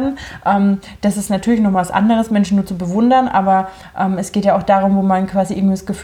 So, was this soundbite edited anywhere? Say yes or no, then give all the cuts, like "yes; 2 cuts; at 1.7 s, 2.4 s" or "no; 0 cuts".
no; 0 cuts